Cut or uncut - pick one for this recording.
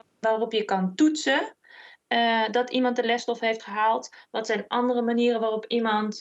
uncut